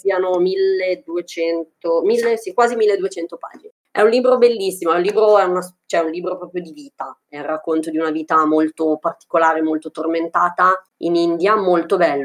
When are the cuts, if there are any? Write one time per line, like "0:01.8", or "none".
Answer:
0:10.9